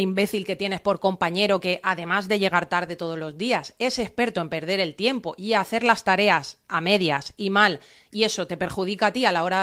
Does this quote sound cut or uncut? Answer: uncut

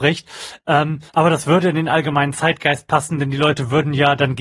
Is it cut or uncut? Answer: cut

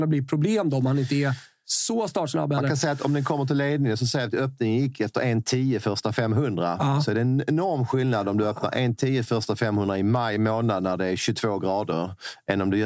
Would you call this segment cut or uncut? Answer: uncut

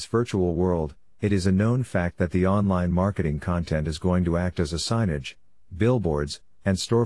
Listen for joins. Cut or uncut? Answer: uncut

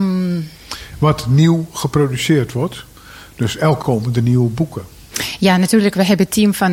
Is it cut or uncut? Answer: cut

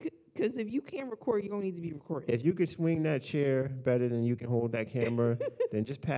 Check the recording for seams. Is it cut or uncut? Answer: uncut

